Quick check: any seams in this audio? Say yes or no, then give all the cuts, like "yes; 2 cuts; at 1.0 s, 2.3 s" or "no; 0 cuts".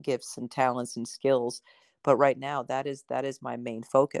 no; 0 cuts